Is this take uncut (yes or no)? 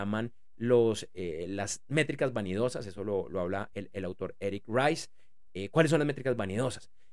yes